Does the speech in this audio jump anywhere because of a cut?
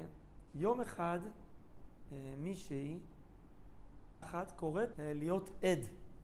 yes; 2 cuts; at 4.2 s, 4.9 s

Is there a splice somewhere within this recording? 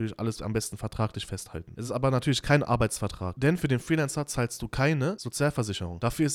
no; 0 cuts

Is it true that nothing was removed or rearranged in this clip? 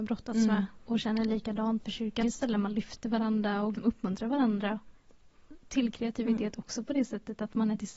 no; 3 cuts; at 1.8 s, 2.2 s, 3.7 s

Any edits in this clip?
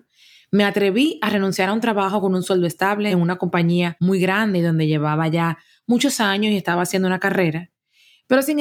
no; 0 cuts

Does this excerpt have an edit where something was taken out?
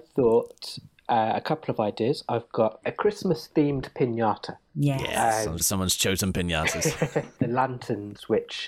yes; 3 cuts; at 2.8 s, 5.6 s, 7.4 s

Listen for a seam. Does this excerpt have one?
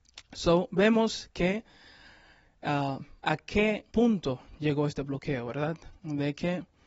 yes; 3 cuts; at 3.2 s, 3.9 s, 6.0 s

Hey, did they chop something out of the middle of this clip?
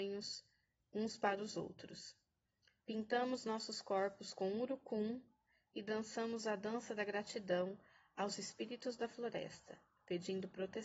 no; 0 cuts

